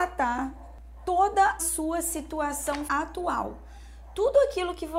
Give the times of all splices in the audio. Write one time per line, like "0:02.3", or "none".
0:01.6
0:02.9

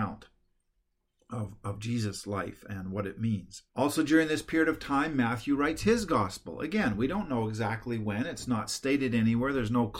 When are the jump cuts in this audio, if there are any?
0:03.7

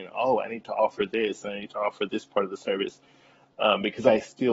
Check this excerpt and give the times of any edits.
none

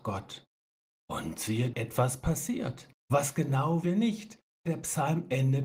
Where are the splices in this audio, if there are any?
0:01.7
0:02.9
0:03.8
0:04.7

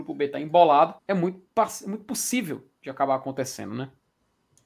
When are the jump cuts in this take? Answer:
0:01.0

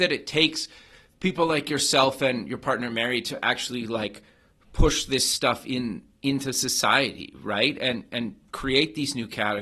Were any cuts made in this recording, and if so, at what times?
none

